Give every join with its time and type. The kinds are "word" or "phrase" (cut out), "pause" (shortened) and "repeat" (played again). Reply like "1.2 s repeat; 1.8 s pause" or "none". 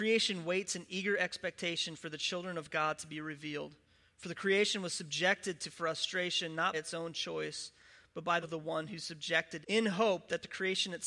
6.7 s word; 8.4 s word; 9.6 s word